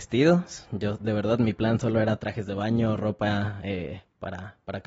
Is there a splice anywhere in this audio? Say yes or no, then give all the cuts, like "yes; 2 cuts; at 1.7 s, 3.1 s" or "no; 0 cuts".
no; 0 cuts